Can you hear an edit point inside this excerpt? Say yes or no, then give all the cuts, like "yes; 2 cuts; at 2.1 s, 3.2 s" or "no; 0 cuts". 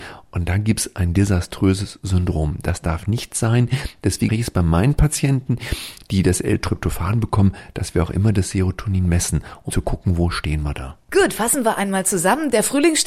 yes; 2 cuts; at 4.3 s, 9.7 s